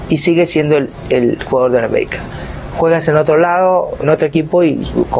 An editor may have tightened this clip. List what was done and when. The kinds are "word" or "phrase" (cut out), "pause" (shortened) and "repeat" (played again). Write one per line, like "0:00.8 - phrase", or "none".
0:04.0 - word